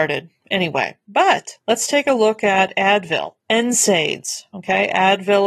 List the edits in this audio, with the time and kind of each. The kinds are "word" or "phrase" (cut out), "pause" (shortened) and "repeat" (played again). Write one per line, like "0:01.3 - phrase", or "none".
0:03.4 - pause